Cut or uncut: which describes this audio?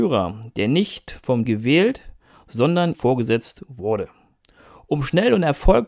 cut